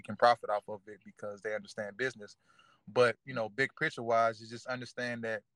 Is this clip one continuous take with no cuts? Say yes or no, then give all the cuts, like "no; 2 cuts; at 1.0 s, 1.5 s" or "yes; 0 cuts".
yes; 0 cuts